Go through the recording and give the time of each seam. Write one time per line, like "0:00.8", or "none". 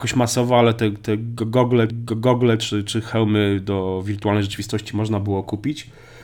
0:01.9